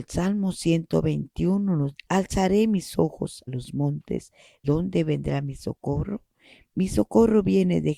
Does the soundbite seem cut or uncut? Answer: cut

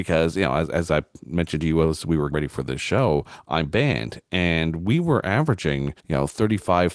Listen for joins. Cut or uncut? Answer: cut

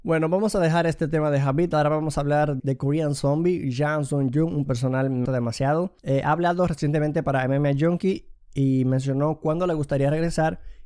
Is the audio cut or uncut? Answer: cut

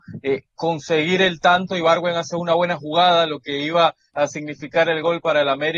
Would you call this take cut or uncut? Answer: uncut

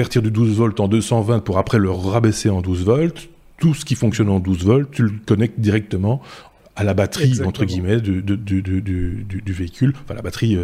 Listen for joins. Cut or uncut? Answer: uncut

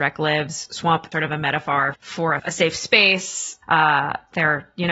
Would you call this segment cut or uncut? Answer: cut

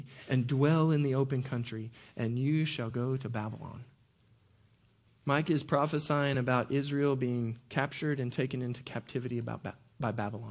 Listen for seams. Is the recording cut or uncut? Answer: uncut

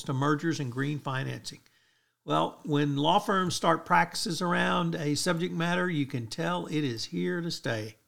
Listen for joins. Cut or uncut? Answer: uncut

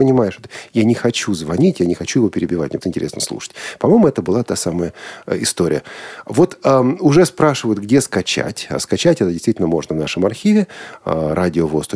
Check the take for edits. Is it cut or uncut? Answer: cut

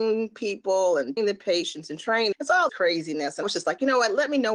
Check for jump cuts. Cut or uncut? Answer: cut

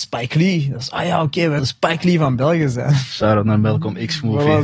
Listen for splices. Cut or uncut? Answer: cut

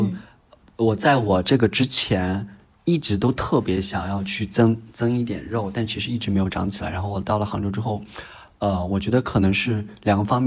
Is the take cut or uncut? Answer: uncut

